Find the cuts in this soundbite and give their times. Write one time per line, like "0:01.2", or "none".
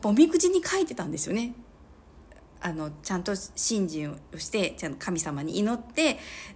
0:04.3